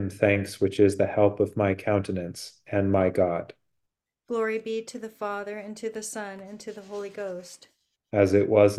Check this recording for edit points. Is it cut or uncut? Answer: uncut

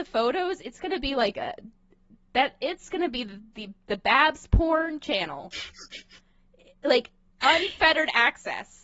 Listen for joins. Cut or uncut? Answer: uncut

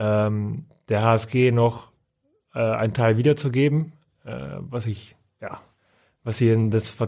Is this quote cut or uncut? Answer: uncut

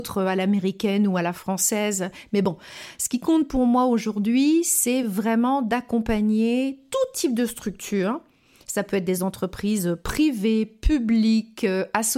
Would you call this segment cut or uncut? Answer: uncut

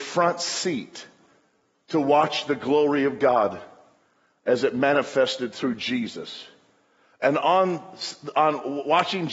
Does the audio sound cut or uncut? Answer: uncut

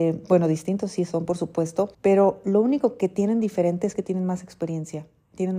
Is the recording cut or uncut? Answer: cut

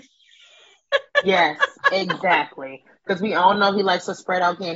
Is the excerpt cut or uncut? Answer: uncut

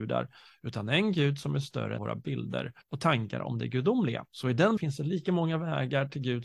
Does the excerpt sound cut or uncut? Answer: cut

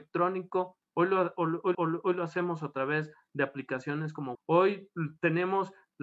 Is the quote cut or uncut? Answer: cut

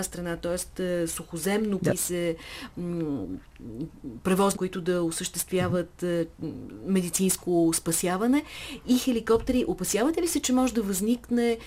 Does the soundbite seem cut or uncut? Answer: cut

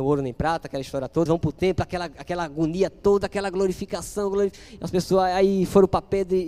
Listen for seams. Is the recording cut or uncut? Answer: cut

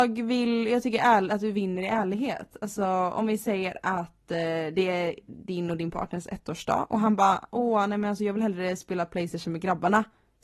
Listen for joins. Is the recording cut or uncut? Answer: uncut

